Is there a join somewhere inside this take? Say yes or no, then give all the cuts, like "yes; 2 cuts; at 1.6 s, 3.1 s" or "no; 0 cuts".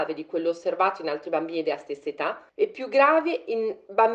yes; 1 cut; at 2.5 s